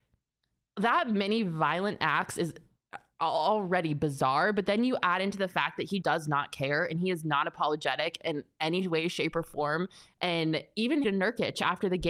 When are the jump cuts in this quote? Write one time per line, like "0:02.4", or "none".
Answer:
0:06.0
0:11.0